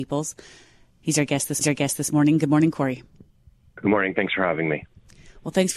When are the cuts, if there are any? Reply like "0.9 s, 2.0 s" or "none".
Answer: 1.6 s